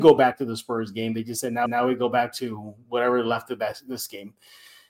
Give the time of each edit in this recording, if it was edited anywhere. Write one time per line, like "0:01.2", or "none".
0:01.7